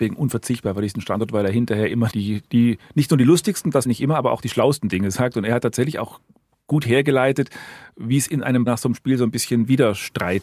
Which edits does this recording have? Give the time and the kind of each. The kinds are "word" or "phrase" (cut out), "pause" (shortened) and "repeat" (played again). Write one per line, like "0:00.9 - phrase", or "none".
0:02.1 - word
0:03.8 - word
0:08.7 - word